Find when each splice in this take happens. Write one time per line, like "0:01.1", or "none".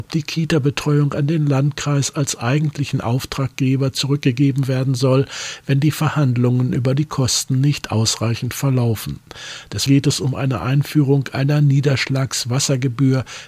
0:09.9